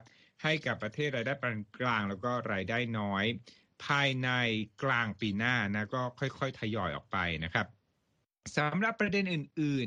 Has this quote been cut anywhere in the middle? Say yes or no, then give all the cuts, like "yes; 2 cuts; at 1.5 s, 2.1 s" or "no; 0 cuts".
no; 0 cuts